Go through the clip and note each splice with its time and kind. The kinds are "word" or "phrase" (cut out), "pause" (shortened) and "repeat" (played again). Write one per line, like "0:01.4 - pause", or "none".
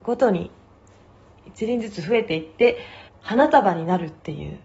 0:03.1 - pause

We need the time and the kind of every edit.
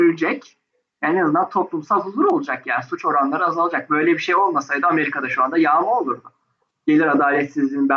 none

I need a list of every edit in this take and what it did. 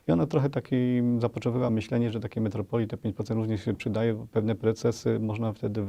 none

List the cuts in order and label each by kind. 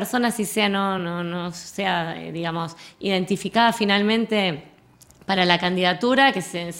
none

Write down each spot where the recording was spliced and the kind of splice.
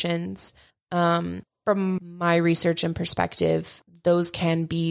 none

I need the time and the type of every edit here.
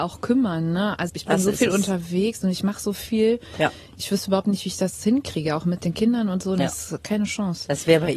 0:01.1 - word

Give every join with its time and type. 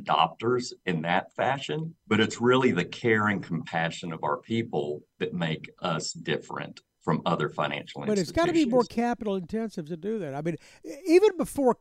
0:02.0 - pause

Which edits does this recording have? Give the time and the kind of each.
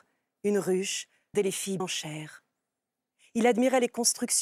0:01.3 - word
0:01.8 - word

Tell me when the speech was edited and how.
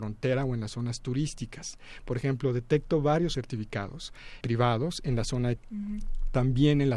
0:03.3 - word
0:04.4 - word
0:05.6 - word

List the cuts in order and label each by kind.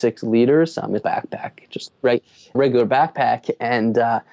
0:01.0 - phrase
0:02.5 - word

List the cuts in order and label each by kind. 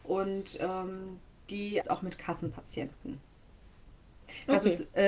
0:01.8 - phrase

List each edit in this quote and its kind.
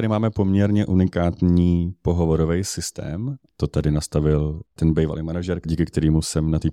0:04.8 - word

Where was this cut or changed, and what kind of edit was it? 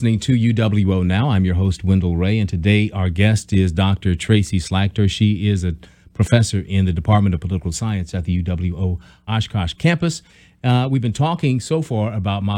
0:09.3 - word

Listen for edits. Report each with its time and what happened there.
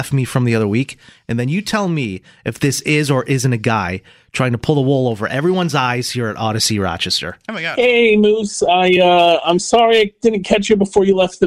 none

